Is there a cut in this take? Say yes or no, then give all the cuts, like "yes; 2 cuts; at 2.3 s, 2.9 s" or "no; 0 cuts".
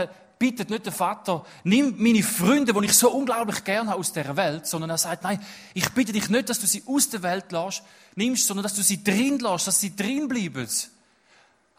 no; 0 cuts